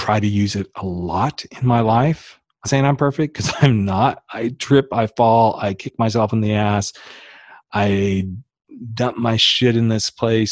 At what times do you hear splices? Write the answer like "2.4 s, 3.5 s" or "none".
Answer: 2.6 s